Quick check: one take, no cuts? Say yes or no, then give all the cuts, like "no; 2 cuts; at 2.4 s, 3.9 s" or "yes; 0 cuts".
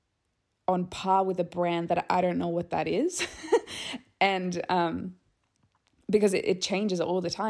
yes; 0 cuts